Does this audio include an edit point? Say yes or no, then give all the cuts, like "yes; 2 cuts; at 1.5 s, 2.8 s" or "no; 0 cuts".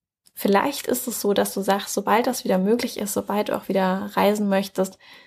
no; 0 cuts